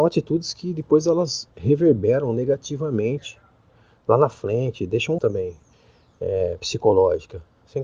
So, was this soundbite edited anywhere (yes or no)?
yes